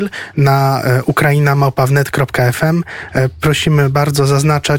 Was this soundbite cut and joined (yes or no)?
no